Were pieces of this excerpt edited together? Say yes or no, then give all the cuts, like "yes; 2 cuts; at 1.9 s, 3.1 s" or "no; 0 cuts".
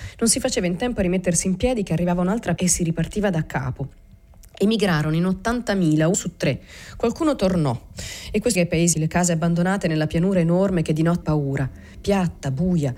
yes; 5 cuts; at 2.6 s, 6.1 s, 8.6 s, 8.9 s, 11.2 s